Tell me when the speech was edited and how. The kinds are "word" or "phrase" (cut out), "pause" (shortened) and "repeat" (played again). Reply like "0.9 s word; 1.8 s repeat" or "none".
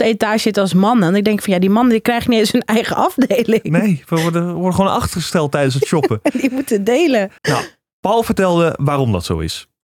7.4 s pause